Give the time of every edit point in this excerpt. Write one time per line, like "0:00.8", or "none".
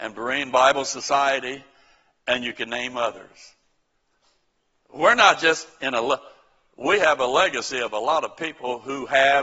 none